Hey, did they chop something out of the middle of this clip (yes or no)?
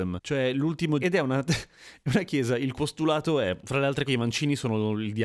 yes